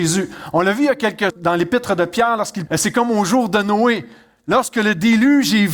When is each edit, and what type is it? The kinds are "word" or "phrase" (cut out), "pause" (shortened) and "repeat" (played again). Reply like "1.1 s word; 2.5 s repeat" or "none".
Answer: 1.3 s phrase; 2.7 s word